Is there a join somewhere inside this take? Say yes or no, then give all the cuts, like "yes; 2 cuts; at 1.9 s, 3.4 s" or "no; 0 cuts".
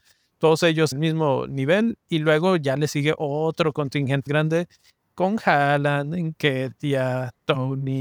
yes; 2 cuts; at 0.9 s, 4.3 s